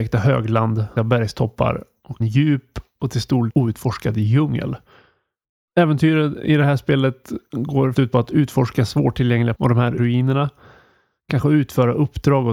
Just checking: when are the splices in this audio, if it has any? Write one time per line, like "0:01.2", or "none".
0:01.0
0:02.2
0:03.5
0:07.9
0:09.5
0:10.0